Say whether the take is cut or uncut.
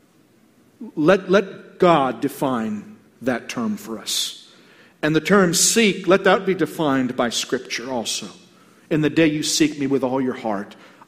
uncut